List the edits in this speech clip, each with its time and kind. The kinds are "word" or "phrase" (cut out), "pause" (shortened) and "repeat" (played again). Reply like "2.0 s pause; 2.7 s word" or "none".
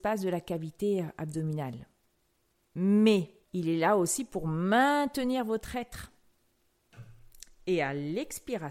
3.4 s pause